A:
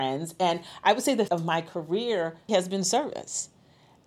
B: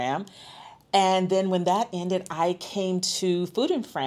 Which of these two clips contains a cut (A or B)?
A